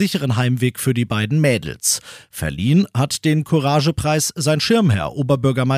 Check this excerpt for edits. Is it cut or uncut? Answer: uncut